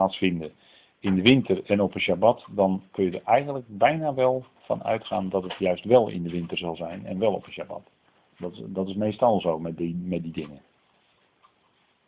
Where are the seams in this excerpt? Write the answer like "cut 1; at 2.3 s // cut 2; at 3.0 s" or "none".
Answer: none